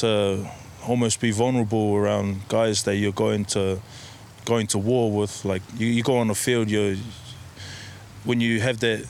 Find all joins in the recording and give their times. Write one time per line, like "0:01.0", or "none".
none